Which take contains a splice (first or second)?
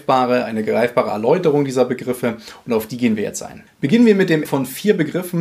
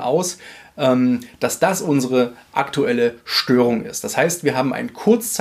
first